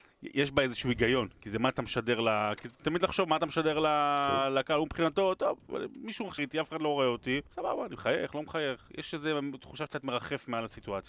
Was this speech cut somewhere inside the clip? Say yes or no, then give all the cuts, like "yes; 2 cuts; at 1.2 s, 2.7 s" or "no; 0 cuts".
yes; 3 cuts; at 6.4 s, 7.5 s, 9.9 s